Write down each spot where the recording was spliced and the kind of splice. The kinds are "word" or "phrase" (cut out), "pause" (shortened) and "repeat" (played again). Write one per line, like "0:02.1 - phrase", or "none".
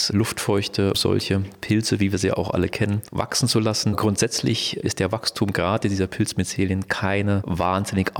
0:00.9 - word